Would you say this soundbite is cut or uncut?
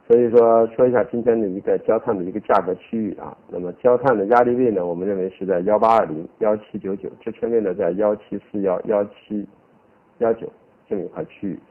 uncut